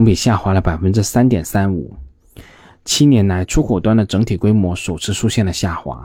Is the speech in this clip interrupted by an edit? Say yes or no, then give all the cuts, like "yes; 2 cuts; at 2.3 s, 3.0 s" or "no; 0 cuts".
no; 0 cuts